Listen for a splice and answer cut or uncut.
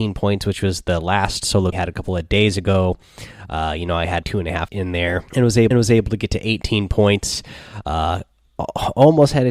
cut